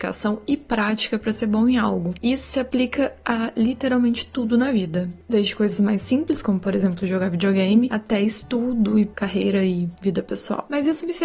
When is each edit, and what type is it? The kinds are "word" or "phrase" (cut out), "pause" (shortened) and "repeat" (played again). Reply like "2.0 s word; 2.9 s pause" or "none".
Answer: none